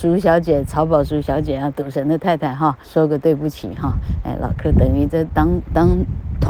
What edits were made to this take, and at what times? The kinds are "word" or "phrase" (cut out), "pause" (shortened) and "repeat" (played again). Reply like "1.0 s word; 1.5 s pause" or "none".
2.8 s pause

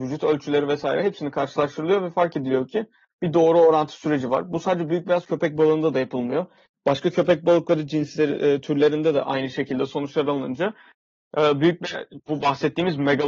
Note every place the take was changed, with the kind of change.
none

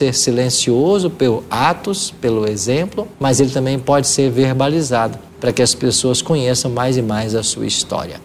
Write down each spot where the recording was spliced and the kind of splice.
3.1 s pause; 5.3 s pause

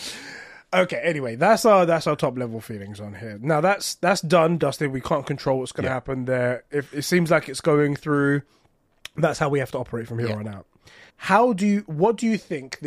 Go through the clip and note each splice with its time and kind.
11.1 s pause

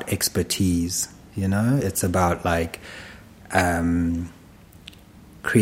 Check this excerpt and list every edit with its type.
none

